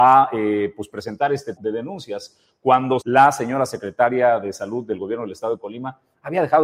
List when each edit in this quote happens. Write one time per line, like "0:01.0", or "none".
0:01.6
0:03.0